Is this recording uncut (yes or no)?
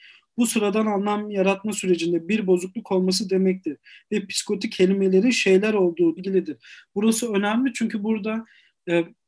no